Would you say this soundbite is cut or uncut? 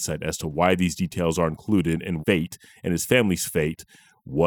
cut